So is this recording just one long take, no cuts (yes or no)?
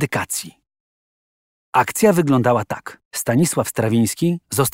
no